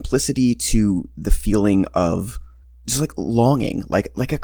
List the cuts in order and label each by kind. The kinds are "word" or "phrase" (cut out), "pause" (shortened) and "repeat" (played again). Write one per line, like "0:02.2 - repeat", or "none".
none